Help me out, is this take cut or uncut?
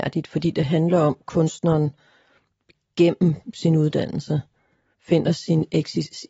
uncut